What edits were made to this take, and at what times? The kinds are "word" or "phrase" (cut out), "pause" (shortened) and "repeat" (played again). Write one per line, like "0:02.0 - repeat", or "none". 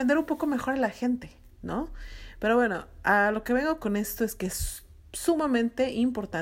none